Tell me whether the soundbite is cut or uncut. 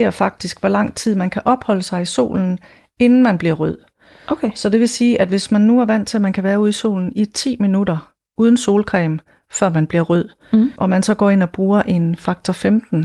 uncut